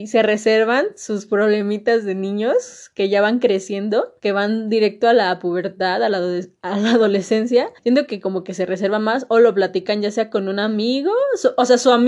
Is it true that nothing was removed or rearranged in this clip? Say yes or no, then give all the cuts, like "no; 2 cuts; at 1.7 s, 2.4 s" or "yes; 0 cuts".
no; 2 cuts; at 4.2 s, 7.8 s